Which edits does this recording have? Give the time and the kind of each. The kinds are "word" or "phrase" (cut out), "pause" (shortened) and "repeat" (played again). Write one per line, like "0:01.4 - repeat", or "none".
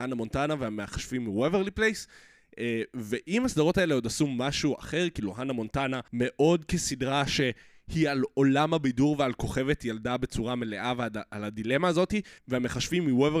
0:06.1 - pause
0:12.4 - pause